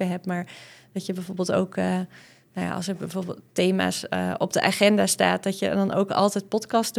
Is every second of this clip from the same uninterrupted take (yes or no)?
yes